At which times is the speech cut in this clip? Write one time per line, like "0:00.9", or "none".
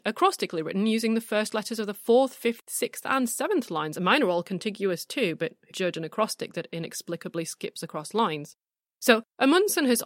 0:05.7
0:08.8